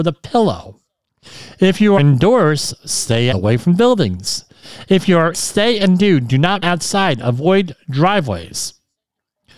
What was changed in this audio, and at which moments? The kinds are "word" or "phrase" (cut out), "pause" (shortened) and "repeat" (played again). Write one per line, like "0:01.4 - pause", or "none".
0:02.0 - word
0:03.3 - word
0:05.3 - word
0:06.6 - word